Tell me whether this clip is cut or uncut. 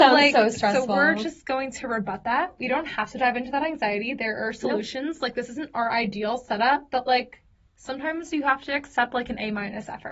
uncut